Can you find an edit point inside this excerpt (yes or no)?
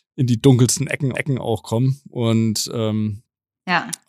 yes